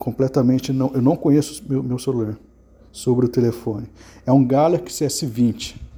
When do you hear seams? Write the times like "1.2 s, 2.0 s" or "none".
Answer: none

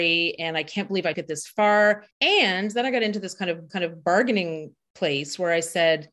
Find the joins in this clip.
1.1 s, 2.1 s, 3.7 s

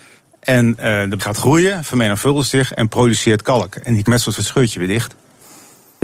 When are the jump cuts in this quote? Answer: 1.2 s, 4.1 s, 4.4 s

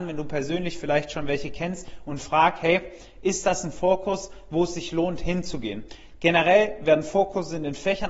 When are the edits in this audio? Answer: none

